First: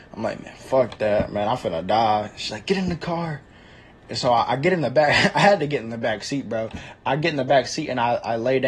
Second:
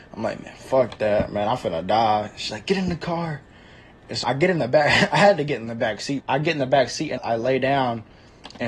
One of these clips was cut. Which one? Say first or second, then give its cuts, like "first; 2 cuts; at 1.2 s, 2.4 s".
second; 3 cuts; at 4.2 s, 6.2 s, 7.2 s